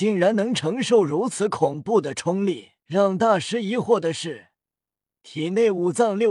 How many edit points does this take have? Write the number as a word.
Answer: one